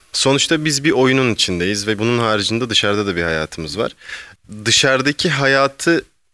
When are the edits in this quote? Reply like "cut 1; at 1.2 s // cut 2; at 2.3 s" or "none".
cut 1; at 2.0 s

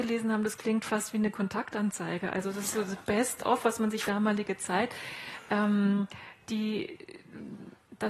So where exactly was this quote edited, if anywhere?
cut 1; at 4.1 s

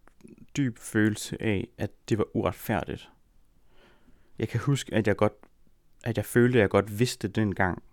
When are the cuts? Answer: none

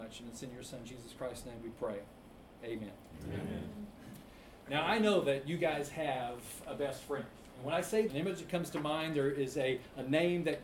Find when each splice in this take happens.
cut 1; at 8.1 s

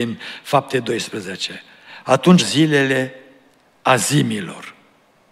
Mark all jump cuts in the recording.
cut 1; at 2.4 s

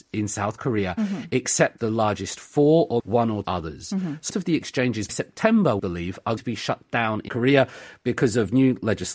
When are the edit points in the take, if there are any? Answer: cut 1; at 1.8 s // cut 2; at 3.0 s // cut 3; at 3.4 s // cut 4; at 4.3 s // cut 5; at 5.1 s // cut 6; at 5.8 s // cut 7; at 6.4 s // cut 8; at 7.3 s

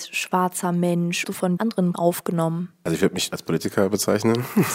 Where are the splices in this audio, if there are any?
cut 1; at 1.2 s // cut 2; at 1.6 s // cut 3; at 1.9 s // cut 4; at 3.3 s

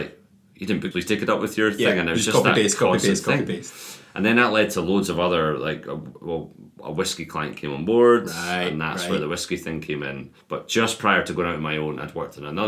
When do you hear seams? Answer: cut 1; at 0.9 s // cut 2; at 10.4 s

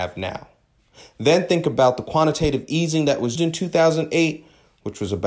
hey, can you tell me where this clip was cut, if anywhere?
cut 1; at 3.4 s

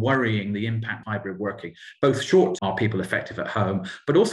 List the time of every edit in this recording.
cut 1; at 1.0 s // cut 2; at 2.6 s

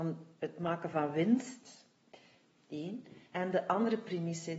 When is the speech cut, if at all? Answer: cut 1; at 3.3 s

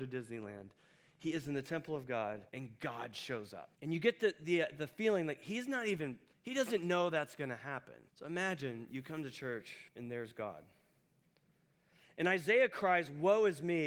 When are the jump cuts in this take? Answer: cut 1; at 2.5 s // cut 2; at 3.7 s // cut 3; at 6.3 s // cut 4; at 8.1 s // cut 5; at 9.9 s

